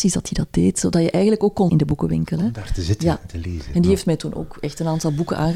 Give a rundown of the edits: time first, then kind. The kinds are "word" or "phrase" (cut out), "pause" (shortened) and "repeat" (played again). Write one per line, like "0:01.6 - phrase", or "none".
0:01.7 - word